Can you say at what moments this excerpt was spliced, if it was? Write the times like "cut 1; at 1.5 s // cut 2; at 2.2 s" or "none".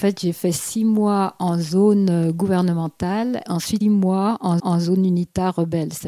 cut 1; at 3.5 s // cut 2; at 3.8 s // cut 3; at 4.6 s